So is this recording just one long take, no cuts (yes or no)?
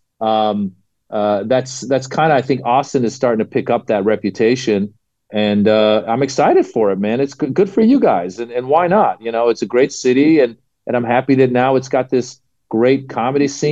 yes